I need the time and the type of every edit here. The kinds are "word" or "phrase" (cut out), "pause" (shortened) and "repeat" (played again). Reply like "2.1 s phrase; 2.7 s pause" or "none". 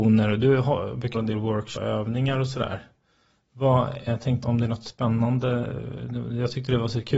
1.1 s word; 1.8 s word; 4.1 s word; 4.4 s word